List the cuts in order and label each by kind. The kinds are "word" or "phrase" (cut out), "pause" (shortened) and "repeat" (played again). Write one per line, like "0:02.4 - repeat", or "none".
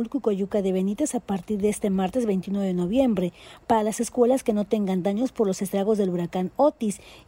none